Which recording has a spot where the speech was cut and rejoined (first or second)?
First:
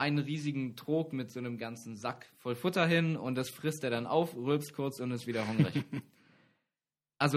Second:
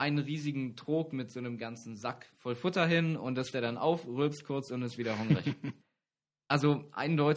second